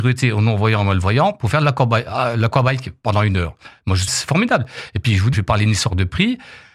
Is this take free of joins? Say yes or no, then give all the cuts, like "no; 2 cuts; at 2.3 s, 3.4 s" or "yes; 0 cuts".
no; 2 cuts; at 4.1 s, 5.3 s